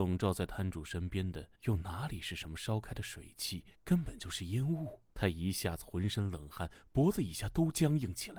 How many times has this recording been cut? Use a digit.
3